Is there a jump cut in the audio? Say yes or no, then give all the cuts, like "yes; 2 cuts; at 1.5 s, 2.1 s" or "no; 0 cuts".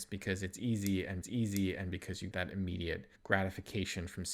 yes; 3 cuts; at 1.2 s, 2.3 s, 3.2 s